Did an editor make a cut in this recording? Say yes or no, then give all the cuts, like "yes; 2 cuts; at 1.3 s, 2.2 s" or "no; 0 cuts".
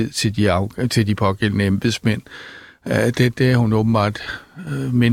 yes; 1 cut; at 3.3 s